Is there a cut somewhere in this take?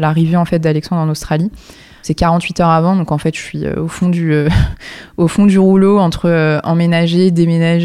no; 0 cuts

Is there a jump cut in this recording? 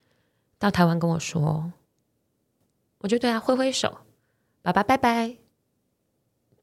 no; 0 cuts

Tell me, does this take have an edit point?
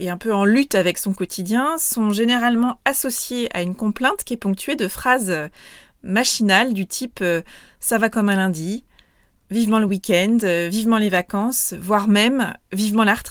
no; 0 cuts

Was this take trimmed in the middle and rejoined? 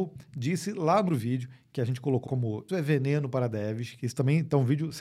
yes; 3 cuts; at 1.1 s, 2.3 s, 2.7 s

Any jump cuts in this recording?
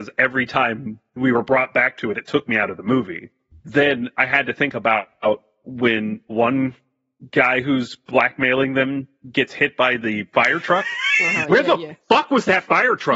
yes; 1 cut; at 6.3 s

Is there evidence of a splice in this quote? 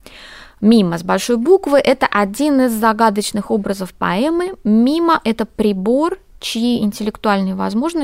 no; 0 cuts

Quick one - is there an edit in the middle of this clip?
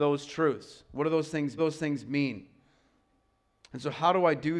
yes; 1 cut; at 1.6 s

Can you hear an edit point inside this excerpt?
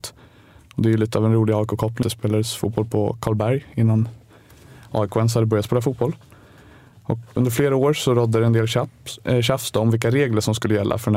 yes; 2 cuts; at 2.0 s, 7.4 s

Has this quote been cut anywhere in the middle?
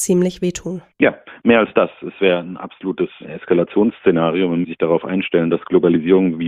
yes; 2 cuts; at 0.9 s, 4.6 s

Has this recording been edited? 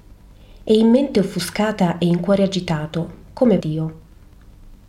yes; 1 cut; at 3.6 s

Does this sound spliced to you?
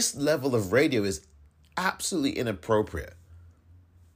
no; 0 cuts

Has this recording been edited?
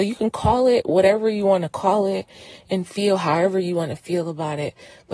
no; 0 cuts

